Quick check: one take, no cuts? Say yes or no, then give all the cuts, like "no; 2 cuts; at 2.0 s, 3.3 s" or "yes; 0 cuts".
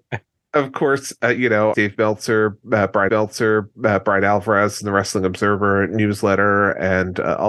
no; 2 cuts; at 1.7 s, 3.1 s